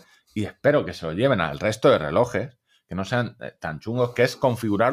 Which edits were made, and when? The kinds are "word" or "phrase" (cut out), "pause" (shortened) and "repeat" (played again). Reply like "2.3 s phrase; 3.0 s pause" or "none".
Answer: none